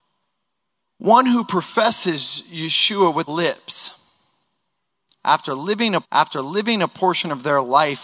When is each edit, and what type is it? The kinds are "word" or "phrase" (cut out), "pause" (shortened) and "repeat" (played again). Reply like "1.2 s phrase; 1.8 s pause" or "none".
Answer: 3.3 s word; 6.0 s repeat

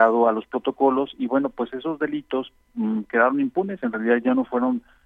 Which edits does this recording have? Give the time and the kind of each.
none

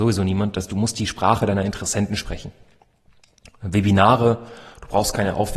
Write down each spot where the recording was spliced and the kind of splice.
none

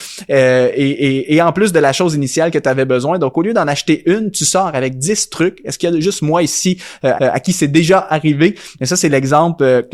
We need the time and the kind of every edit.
7.2 s repeat

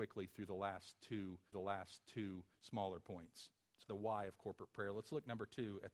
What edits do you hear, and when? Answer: 1.5 s repeat; 3.8 s word

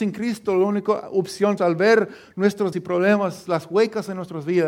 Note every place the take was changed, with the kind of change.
1.6 s phrase; 2.7 s word

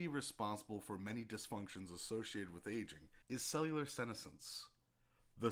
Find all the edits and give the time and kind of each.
3.2 s pause

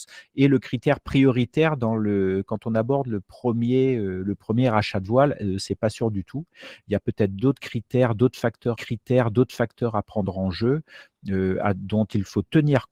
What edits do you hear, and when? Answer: 8.8 s repeat

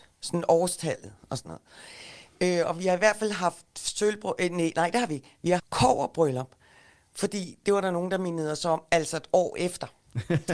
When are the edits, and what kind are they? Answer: 5.6 s word

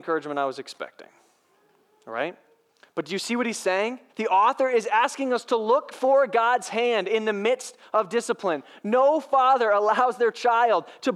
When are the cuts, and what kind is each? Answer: 4.1 s pause

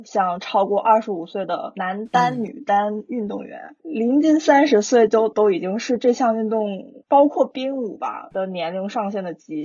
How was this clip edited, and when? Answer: 8.3 s word

